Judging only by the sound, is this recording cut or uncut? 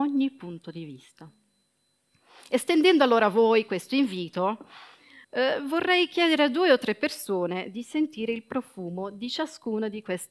cut